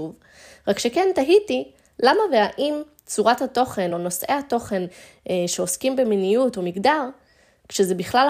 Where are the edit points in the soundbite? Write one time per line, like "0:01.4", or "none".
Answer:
none